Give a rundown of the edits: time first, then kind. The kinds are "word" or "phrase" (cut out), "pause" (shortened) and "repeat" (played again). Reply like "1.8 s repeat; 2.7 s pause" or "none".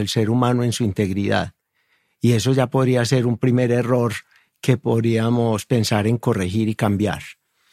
none